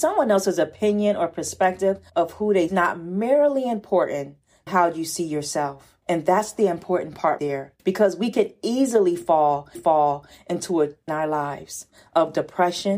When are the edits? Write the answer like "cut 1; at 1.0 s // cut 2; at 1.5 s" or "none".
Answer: cut 1; at 2.1 s // cut 2; at 2.7 s // cut 3; at 4.7 s // cut 4; at 6.0 s // cut 5; at 7.4 s // cut 6; at 7.8 s // cut 7; at 9.7 s // cut 8; at 11.1 s